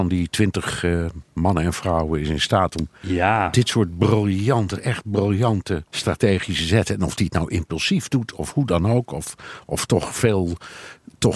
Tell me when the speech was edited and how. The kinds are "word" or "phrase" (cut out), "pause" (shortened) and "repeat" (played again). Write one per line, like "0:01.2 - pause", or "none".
0:05.9 - pause